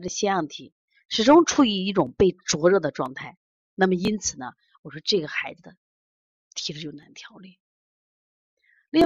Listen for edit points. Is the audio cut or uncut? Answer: uncut